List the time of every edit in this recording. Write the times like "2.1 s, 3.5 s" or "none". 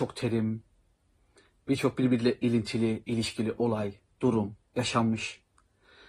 4.7 s